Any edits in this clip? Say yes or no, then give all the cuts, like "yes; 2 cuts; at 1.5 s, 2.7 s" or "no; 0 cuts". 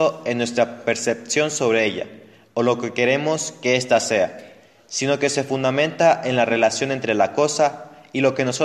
no; 0 cuts